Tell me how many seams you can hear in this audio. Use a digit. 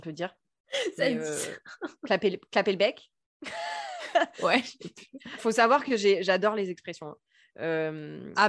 1